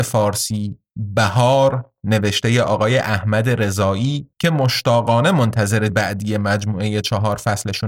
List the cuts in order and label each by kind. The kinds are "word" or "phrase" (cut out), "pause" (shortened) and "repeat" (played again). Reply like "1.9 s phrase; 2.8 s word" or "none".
4.3 s pause; 5.9 s word